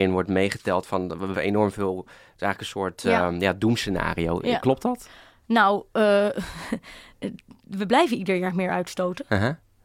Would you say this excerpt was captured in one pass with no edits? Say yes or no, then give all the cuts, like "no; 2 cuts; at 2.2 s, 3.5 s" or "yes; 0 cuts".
no; 1 cut; at 1.3 s